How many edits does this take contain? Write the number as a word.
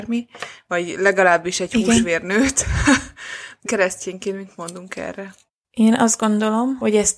one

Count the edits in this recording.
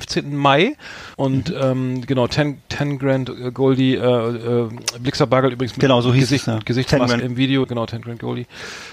three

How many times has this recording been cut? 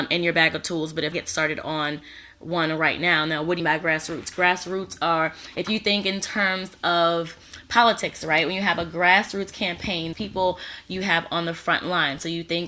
three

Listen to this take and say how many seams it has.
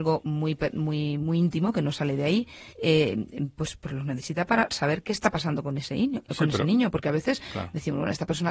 two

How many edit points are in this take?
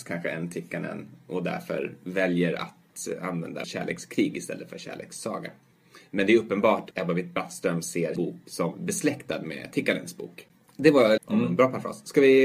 four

